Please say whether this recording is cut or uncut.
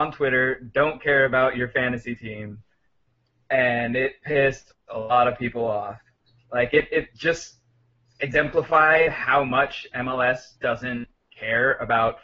cut